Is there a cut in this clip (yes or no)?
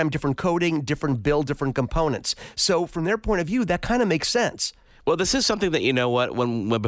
no